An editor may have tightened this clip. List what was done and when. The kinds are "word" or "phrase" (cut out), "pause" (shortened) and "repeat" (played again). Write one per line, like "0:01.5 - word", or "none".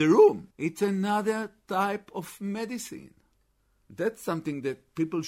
none